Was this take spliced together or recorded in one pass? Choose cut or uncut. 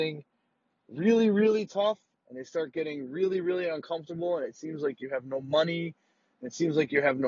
uncut